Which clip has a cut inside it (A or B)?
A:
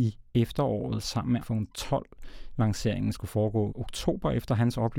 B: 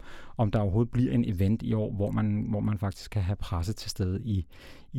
A